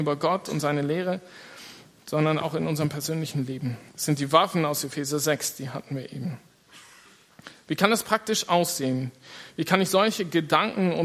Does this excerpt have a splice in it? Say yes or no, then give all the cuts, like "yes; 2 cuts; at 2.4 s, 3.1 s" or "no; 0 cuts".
yes; 1 cut; at 3.9 s